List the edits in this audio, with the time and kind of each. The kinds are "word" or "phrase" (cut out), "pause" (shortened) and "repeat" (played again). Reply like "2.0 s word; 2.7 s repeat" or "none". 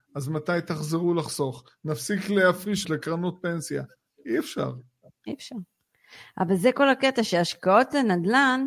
2.8 s phrase